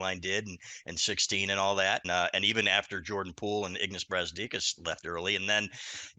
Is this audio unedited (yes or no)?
no